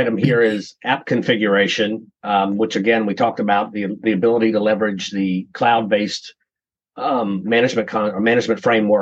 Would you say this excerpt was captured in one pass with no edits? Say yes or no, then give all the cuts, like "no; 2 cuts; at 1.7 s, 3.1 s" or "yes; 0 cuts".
yes; 0 cuts